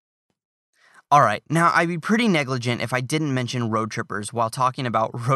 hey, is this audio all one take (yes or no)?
yes